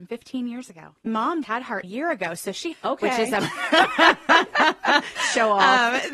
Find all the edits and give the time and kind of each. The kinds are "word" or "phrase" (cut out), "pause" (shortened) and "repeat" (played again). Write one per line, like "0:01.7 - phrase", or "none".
0:01.4 - word
0:01.8 - phrase
0:02.7 - phrase
0:03.4 - word